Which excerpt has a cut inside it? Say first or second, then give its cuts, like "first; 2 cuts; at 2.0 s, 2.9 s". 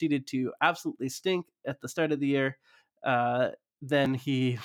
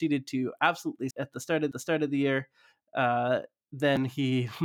second; 2 cuts; at 1.1 s, 1.7 s